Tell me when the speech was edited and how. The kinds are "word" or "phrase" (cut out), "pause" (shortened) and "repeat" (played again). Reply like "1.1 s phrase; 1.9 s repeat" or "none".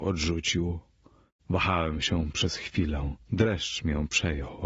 3.2 s pause